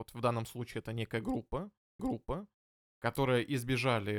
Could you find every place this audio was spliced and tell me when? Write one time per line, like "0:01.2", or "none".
0:02.0

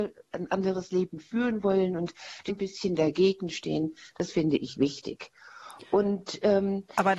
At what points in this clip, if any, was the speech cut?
0:02.5

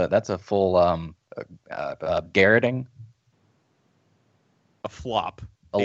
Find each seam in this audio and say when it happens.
0:01.2
0:02.3

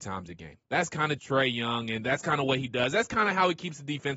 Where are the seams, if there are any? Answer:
0:01.2

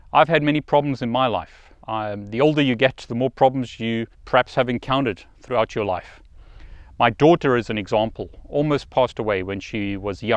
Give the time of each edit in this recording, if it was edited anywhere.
0:01.8
0:04.1

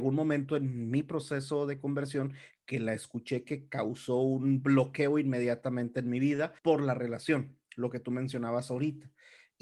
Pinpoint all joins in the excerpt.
0:06.6

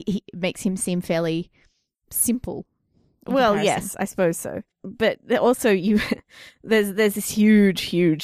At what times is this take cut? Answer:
none

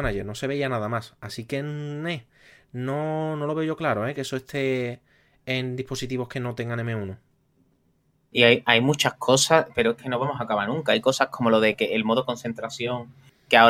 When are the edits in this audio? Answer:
none

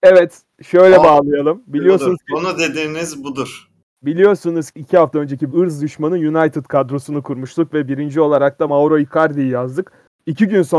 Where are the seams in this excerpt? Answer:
0:04.7
0:05.5
0:08.7

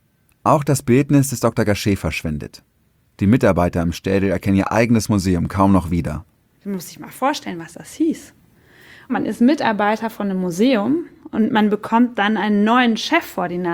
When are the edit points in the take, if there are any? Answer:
none

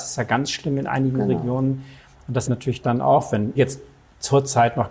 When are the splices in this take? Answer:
0:02.4
0:02.8
0:03.6

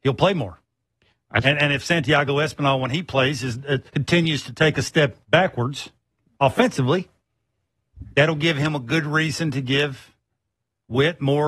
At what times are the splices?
0:03.9
0:05.2

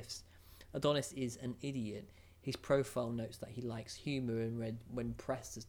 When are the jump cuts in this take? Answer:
none

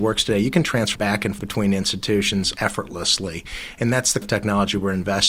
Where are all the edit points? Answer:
0:00.9
0:01.4
0:02.5
0:04.2

